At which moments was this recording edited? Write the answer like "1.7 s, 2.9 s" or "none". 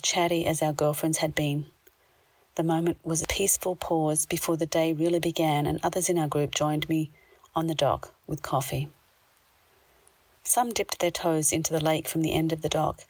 none